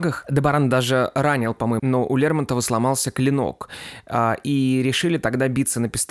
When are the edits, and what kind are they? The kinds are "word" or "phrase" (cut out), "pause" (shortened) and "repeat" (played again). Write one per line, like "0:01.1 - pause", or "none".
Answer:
0:01.8 - phrase